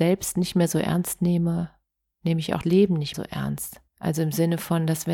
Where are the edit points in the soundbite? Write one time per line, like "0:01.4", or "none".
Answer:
0:02.6
0:03.1
0:03.9